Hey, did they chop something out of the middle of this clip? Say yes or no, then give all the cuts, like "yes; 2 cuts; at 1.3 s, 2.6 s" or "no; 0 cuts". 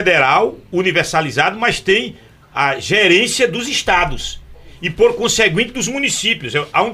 no; 0 cuts